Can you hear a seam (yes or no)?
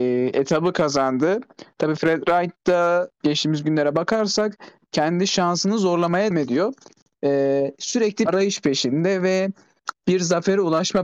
yes